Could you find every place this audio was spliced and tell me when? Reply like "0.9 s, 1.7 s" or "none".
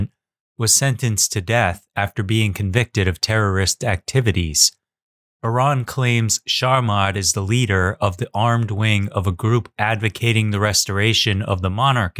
none